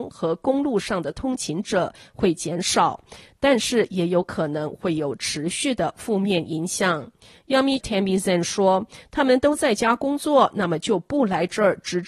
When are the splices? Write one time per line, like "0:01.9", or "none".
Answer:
0:07.8